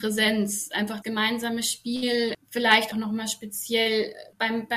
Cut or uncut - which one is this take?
cut